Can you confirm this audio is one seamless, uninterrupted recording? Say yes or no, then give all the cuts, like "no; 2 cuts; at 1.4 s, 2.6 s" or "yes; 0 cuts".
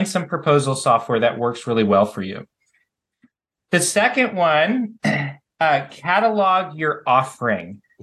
yes; 0 cuts